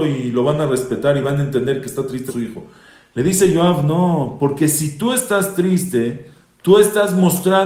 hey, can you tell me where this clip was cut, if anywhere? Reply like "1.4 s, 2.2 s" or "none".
2.3 s